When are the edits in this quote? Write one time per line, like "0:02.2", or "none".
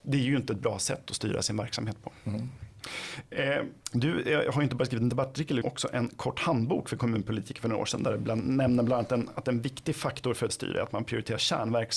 0:03.8
0:05.6
0:10.5